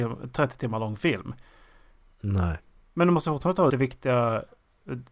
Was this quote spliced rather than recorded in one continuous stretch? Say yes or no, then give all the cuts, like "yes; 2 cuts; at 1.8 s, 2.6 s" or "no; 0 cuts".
yes; 1 cut; at 3.7 s